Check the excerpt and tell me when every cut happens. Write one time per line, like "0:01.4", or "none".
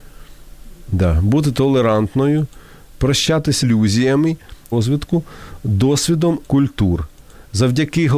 0:03.6
0:04.7
0:06.4